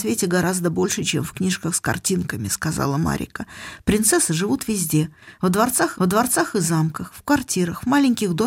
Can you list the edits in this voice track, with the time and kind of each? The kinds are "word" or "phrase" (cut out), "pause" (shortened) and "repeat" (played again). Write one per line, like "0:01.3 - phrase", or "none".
0:05.9 - repeat